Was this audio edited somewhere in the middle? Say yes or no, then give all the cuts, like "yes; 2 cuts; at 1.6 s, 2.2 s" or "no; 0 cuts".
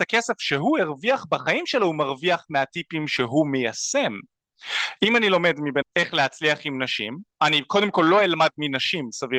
yes; 1 cut; at 5.8 s